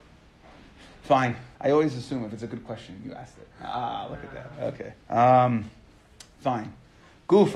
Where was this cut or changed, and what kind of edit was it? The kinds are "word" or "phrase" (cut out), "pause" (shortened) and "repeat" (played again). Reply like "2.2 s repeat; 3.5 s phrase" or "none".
1.5 s pause; 3.5 s pause; 5.0 s pause

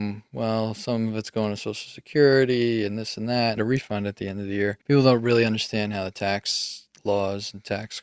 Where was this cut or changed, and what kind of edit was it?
3.6 s phrase; 4.8 s pause

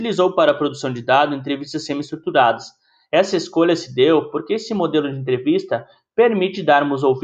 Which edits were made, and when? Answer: none

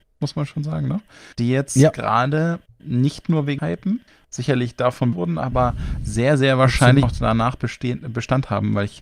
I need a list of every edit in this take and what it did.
1.3 s pause; 3.6 s phrase; 4.1 s pause; 5.1 s word; 7.0 s word

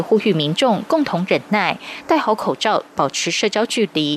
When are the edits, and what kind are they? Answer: 2.9 s phrase

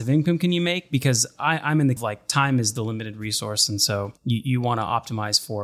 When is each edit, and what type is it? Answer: 2.0 s phrase; 4.2 s pause

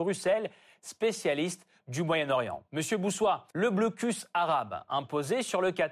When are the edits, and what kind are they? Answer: 2.7 s pause; 3.5 s pause

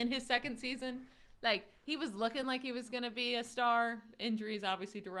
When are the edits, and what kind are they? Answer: none

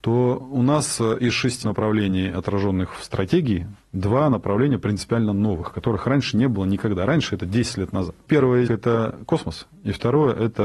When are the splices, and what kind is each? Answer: 1.6 s word; 8.7 s word

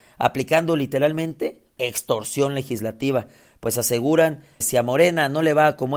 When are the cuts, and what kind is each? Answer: 1.8 s word; 4.6 s word

